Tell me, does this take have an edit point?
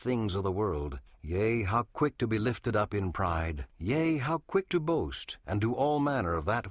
yes; 2 cuts; at 1.1 s, 3.7 s

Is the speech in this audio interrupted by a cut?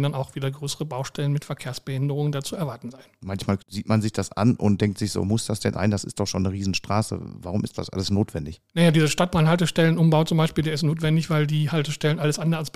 yes; 2 cuts; at 3.6 s, 5.7 s

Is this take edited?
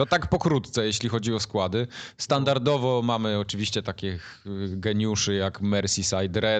no; 0 cuts

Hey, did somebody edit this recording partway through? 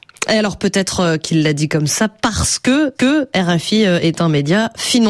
yes; 1 cut; at 2.9 s

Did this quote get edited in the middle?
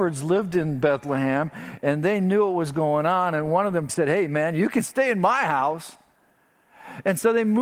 yes; 1 cut; at 3.9 s

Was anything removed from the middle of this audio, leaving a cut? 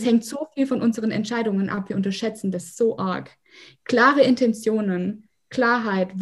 no; 0 cuts

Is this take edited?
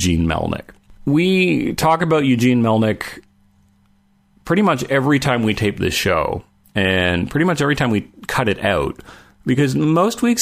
no; 0 cuts

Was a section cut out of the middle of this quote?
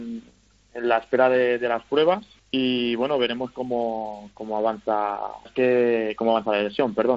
yes; 2 cuts; at 2.4 s, 5.5 s

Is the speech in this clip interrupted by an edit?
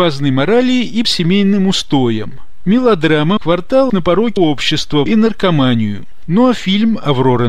yes; 5 cuts; at 1.0 s, 3.4 s, 3.9 s, 4.4 s, 5.1 s

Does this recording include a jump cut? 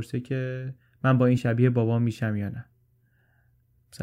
no; 0 cuts

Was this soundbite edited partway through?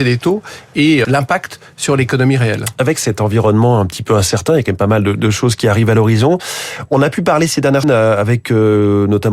yes; 2 cuts; at 1.0 s, 7.8 s

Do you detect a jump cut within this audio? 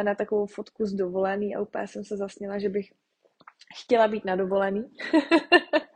no; 0 cuts

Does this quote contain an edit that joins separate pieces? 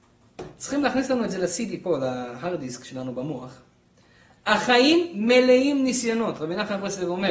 no; 0 cuts

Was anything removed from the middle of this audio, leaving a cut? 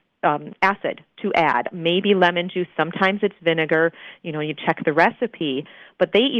no; 0 cuts

